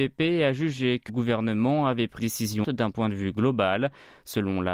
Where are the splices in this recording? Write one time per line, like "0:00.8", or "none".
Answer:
0:01.1
0:02.2
0:02.6